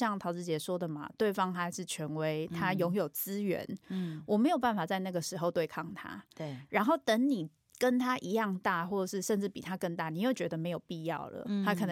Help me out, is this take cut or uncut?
cut